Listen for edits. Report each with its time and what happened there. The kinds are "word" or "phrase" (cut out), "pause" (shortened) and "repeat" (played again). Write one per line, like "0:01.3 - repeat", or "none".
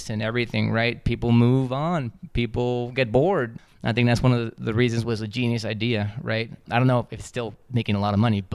0:05.0 - phrase